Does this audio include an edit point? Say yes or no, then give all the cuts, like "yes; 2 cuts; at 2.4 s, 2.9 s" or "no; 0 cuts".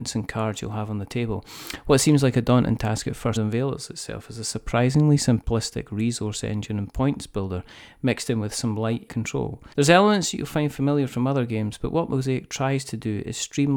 yes; 3 cuts; at 3.4 s, 9.1 s, 9.7 s